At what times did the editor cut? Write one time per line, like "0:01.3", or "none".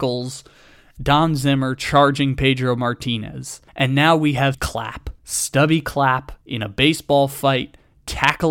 0:01.0
0:03.7
0:04.5
0:05.2
0:06.4